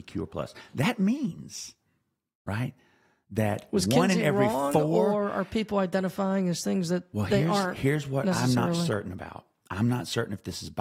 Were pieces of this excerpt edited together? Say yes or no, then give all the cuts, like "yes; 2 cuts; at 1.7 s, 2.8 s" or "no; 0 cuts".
no; 0 cuts